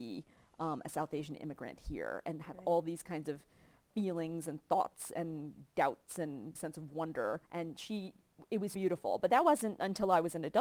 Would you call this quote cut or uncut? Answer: cut